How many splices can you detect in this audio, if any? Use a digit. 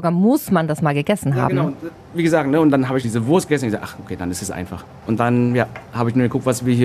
1